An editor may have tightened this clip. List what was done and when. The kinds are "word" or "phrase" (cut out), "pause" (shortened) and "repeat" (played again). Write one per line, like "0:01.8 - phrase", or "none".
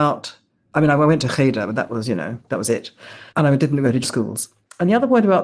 0:03.3 - pause
0:04.0 - word